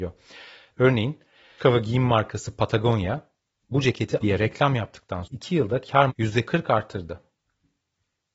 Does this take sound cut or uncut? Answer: cut